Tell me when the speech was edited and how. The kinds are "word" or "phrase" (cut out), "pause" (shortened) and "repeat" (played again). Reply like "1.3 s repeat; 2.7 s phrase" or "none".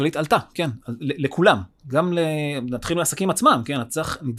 none